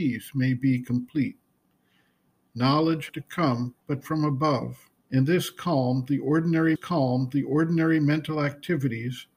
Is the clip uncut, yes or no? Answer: no